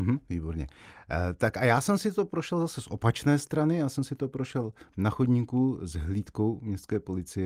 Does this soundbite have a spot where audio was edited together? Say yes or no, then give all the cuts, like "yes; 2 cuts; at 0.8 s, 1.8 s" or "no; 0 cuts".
no; 0 cuts